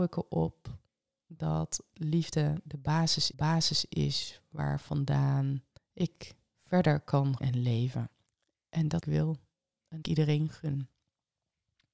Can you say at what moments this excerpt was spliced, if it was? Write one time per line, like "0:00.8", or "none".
0:03.3
0:05.8
0:07.4
0:08.3
0:09.0
0:10.0